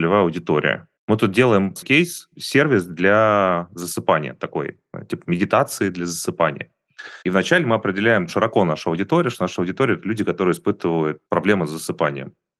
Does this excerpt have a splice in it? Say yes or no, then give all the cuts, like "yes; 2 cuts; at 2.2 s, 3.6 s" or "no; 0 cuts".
yes; 5 cuts; at 1.0 s, 1.8 s, 7.2 s, 8.3 s, 11.3 s